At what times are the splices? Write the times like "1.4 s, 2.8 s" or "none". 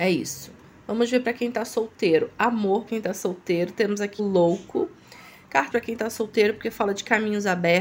2.9 s, 4.2 s, 5.7 s